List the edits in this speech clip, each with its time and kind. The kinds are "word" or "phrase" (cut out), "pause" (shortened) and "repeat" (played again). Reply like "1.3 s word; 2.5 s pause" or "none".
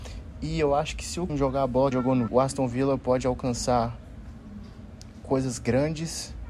1.3 s word; 1.9 s phrase; 2.3 s word